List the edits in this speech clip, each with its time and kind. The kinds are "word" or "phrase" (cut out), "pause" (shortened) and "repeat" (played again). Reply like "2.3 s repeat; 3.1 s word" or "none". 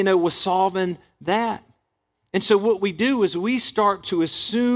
none

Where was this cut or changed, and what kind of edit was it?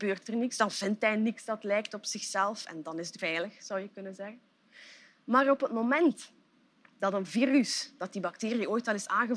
3.2 s word

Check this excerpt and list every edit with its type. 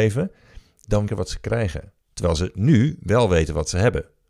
1.1 s phrase; 2.0 s pause

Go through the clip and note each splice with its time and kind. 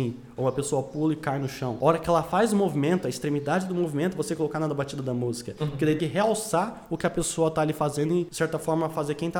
6.0 s phrase

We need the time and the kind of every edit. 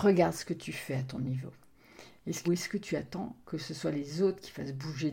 2.4 s phrase

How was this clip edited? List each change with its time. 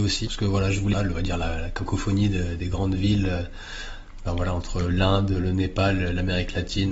0.9 s phrase

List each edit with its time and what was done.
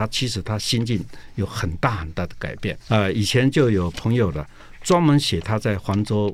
2.8 s word

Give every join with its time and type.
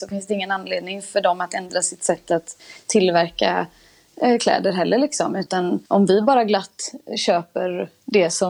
5.9 s pause

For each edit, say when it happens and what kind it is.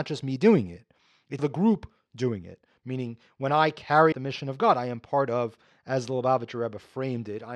1.4 s word; 4.1 s word

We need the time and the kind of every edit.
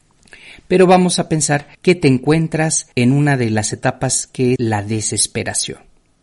1.7 s pause; 2.9 s pause; 4.6 s word

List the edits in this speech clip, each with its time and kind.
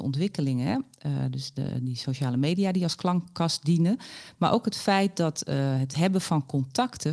none

